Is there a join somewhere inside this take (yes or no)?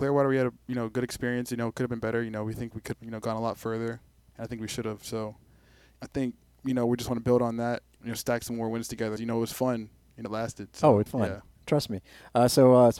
yes